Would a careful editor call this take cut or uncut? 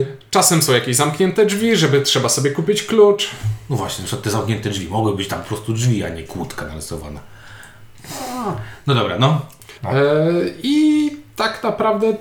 cut